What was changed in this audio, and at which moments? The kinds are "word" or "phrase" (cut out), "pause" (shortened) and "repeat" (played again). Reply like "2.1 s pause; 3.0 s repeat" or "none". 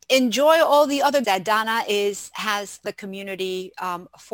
1.2 s word; 2.8 s word